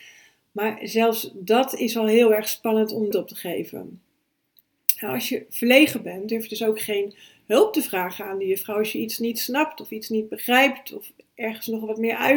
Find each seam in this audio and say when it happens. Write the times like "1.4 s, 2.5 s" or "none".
3.1 s